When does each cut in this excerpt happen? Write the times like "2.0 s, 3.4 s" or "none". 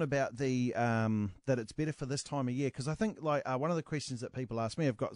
none